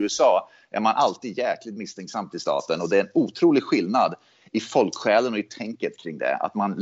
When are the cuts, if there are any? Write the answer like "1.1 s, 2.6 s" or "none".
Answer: none